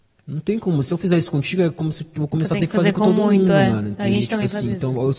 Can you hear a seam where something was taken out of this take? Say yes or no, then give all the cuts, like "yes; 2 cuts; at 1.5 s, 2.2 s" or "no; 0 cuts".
no; 0 cuts